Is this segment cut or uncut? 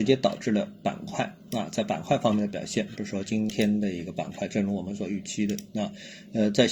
uncut